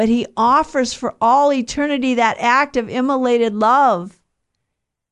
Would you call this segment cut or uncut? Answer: uncut